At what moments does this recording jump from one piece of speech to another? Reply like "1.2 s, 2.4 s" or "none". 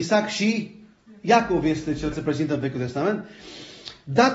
2.1 s